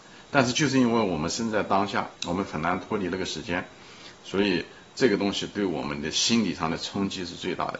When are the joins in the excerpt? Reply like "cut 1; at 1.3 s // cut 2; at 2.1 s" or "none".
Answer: cut 1; at 2.1 s